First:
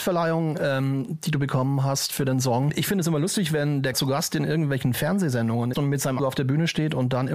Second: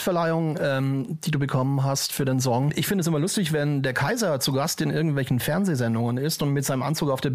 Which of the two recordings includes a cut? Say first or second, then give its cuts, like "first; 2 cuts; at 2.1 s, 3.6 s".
first; 3 cuts; at 3.9 s, 5.7 s, 6.2 s